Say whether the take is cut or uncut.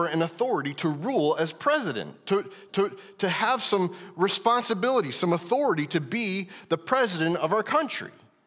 cut